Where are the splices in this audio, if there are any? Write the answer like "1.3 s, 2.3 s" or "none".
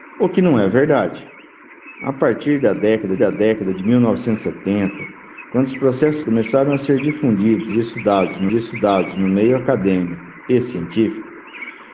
3.2 s, 6.2 s, 8.5 s

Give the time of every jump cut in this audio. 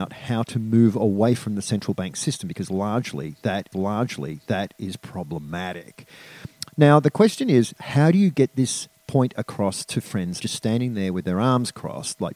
3.7 s, 10.4 s

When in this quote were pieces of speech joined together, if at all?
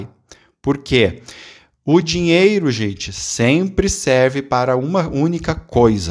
none

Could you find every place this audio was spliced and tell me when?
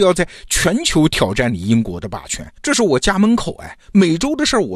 2.6 s

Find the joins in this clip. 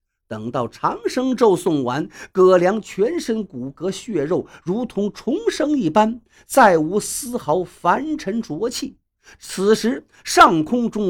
none

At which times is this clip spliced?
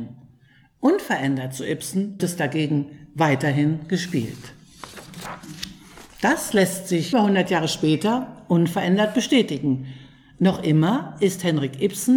2.2 s, 7.1 s

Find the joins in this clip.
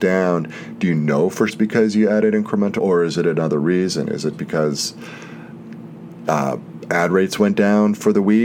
1.5 s, 2.8 s, 4.3 s

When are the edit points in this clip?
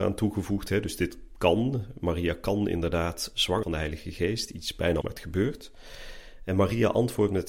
3.6 s, 5.0 s

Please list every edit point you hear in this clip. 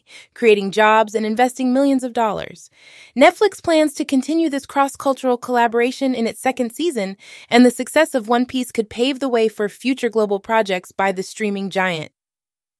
none

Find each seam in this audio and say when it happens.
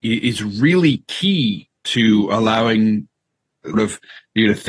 1.8 s, 3.7 s

